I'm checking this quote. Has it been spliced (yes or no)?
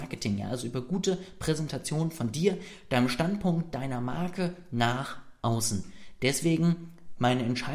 no